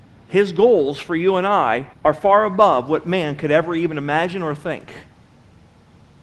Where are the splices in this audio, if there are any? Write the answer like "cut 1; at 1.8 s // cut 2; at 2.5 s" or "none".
cut 1; at 1.9 s